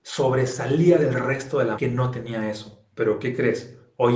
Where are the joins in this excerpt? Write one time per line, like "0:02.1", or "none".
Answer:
0:01.8
0:02.9